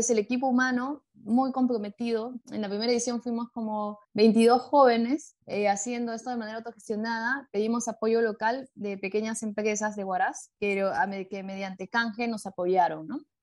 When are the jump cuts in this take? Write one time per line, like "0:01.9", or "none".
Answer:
0:02.4
0:04.0
0:05.4
0:10.5